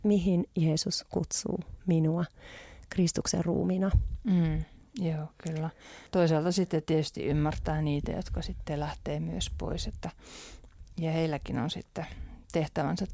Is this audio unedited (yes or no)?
no